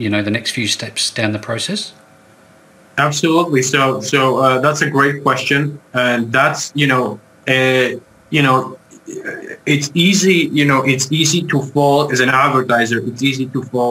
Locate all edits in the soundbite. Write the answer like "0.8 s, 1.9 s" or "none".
none